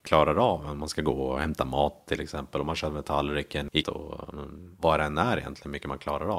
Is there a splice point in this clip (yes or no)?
yes